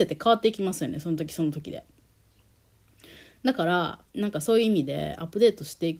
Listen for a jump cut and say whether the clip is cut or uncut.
cut